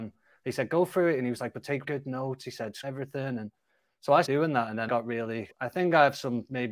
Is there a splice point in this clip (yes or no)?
yes